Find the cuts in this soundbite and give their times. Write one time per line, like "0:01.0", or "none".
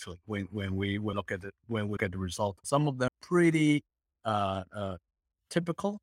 0:01.1
0:02.0
0:02.6
0:03.1
0:04.2